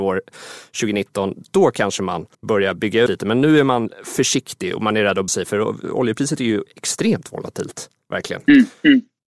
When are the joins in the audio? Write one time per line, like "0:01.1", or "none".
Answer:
0:02.3
0:03.1
0:05.3